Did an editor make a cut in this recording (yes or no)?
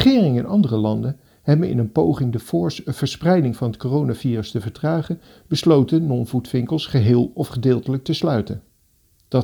no